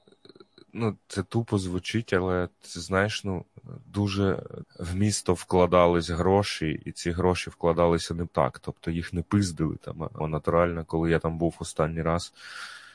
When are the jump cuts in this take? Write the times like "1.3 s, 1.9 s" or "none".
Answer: 1.0 s, 4.6 s, 8.3 s, 10.2 s